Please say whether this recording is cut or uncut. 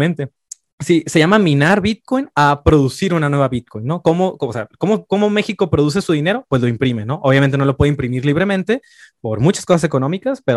uncut